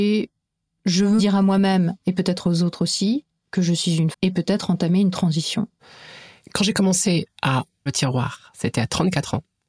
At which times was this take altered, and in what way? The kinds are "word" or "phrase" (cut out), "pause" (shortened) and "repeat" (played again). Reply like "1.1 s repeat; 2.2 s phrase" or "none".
1.2 s word; 4.1 s word; 7.9 s word